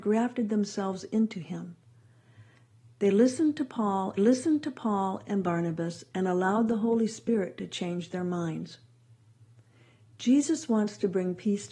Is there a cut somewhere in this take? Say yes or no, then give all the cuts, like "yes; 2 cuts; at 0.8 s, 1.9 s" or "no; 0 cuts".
yes; 1 cut; at 4.2 s